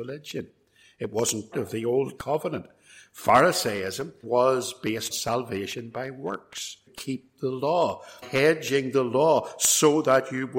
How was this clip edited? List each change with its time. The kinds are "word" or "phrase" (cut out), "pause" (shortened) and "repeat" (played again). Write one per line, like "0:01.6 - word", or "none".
0:01.5 - word
0:02.2 - word
0:04.2 - word
0:05.1 - word
0:06.9 - phrase
0:08.2 - word